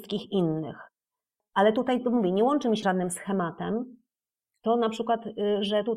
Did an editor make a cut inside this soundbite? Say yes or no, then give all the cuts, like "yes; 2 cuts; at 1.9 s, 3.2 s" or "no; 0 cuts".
yes; 1 cut; at 2.8 s